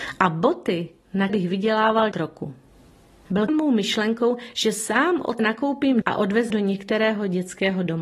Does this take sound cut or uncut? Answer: cut